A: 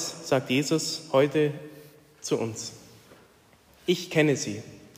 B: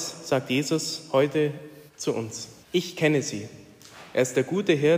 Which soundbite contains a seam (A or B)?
B